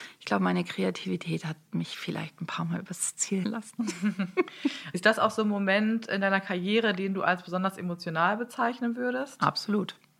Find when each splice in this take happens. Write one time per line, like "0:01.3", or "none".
0:03.4